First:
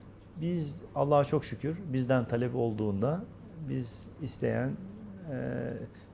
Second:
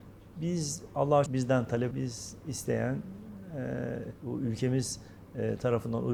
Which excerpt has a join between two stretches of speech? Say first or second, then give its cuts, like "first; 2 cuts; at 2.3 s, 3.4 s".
second; 3 cuts; at 1.3 s, 1.9 s, 4.2 s